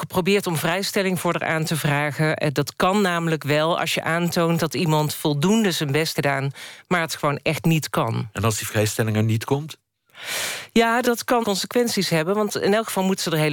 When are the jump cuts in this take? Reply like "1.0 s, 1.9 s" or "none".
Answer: 6.1 s, 11.0 s, 11.4 s